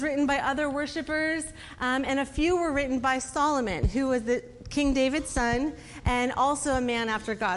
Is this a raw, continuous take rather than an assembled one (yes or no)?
yes